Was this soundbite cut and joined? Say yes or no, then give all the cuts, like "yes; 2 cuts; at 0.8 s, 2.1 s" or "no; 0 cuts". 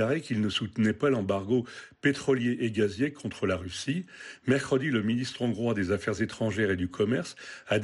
no; 0 cuts